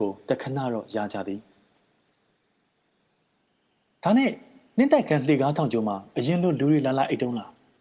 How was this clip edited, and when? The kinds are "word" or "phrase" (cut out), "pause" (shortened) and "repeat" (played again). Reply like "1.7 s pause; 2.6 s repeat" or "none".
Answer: none